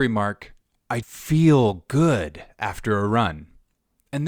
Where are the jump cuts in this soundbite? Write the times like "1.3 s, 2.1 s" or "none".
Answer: 1.0 s